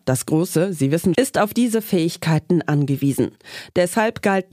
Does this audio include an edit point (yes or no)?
yes